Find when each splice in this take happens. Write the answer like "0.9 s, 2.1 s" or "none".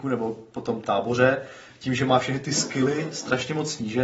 none